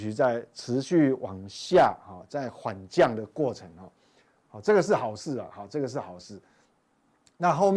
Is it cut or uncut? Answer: uncut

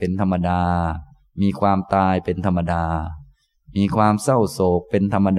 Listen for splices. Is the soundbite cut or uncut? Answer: uncut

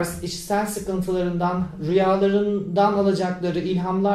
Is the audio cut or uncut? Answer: uncut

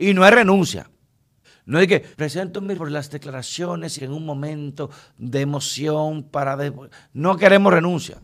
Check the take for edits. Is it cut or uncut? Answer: cut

